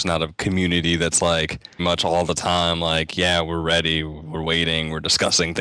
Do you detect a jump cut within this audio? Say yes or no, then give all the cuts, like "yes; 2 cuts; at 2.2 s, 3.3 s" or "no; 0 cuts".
yes; 1 cut; at 1.8 s